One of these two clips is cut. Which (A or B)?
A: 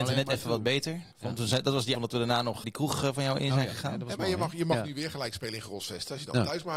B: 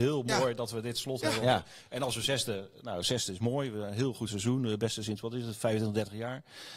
A